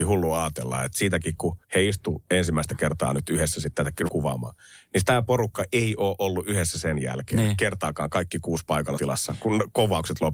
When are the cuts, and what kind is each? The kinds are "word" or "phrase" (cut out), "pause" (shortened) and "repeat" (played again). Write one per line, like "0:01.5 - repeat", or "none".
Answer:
0:01.6 - pause
0:04.1 - phrase
0:09.0 - word